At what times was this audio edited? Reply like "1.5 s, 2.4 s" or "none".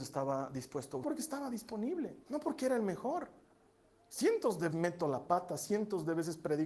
1.0 s, 2.2 s, 4.7 s